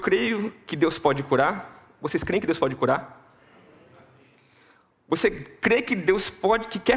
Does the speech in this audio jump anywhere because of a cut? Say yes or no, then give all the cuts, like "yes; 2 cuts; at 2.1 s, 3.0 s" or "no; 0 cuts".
no; 0 cuts